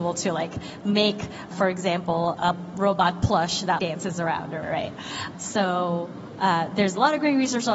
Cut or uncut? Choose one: cut